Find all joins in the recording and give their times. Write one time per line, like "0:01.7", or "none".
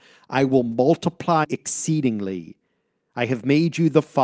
0:01.4